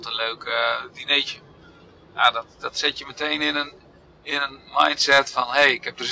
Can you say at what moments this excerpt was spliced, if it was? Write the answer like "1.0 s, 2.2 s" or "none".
none